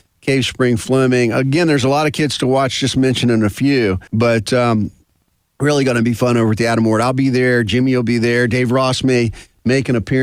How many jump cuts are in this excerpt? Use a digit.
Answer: 1